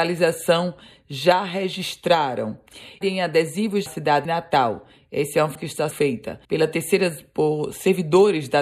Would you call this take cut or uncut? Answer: cut